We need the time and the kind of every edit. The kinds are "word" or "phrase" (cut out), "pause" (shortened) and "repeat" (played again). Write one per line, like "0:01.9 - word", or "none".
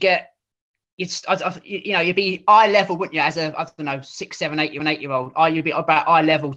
0:04.8 - repeat